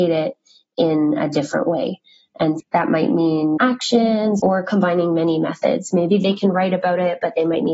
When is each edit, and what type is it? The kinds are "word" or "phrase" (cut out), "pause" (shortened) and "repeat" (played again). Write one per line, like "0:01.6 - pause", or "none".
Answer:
0:02.6 - word
0:03.6 - word
0:04.4 - phrase